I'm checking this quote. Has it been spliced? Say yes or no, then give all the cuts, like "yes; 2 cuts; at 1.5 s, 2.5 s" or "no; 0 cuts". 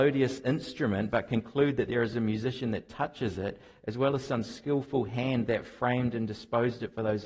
no; 0 cuts